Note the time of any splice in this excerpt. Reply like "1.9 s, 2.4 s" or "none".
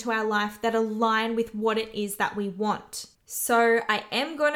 3.1 s

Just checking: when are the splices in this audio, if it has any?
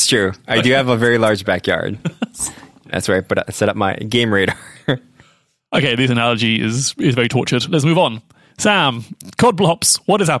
none

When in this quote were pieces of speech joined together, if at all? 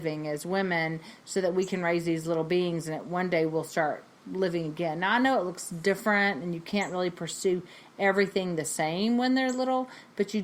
none

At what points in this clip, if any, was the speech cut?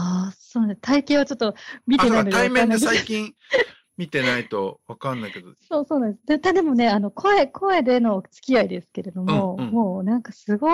none

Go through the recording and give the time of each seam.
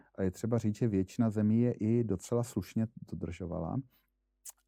none

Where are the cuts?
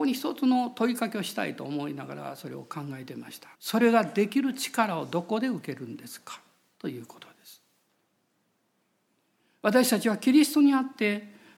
3.5 s

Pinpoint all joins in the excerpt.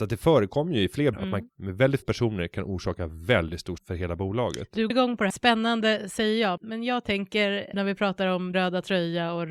1.1 s, 1.5 s, 2.0 s, 3.8 s, 4.9 s, 5.3 s, 6.6 s, 7.7 s, 8.5 s

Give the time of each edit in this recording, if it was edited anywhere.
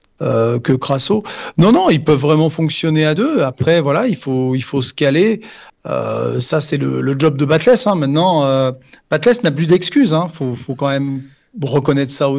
none

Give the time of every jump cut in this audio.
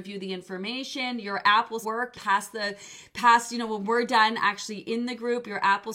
1.8 s, 2.1 s

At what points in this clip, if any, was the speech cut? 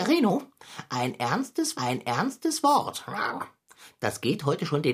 1.7 s

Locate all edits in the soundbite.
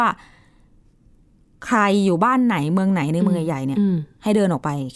none

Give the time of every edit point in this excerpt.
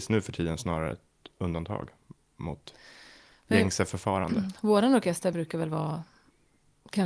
none

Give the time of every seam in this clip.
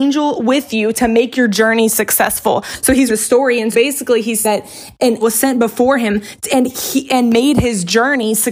3.1 s, 3.7 s, 4.4 s, 5.2 s

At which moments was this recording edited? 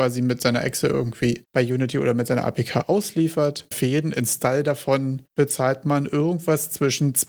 3.7 s

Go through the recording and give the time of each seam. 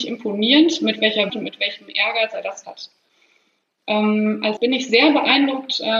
1.3 s, 2.6 s, 4.6 s

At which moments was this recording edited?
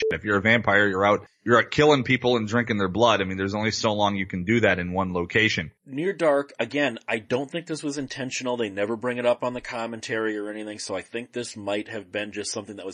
none

